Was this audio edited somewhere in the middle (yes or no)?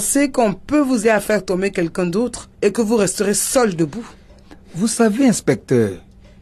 yes